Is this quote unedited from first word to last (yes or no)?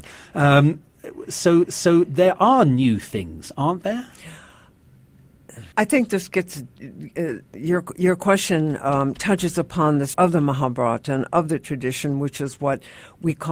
no